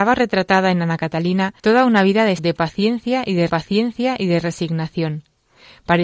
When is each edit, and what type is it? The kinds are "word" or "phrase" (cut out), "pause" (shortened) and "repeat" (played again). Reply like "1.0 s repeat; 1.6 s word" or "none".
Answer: 1.6 s pause; 2.4 s word; 3.5 s repeat